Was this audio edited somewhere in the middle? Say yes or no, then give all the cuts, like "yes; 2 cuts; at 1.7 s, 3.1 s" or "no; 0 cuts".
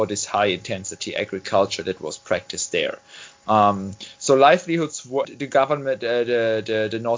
yes; 1 cut; at 5.2 s